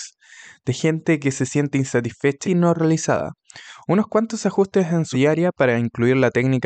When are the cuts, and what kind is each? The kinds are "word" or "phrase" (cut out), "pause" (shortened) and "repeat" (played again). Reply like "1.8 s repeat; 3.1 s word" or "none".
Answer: 2.4 s word; 5.1 s word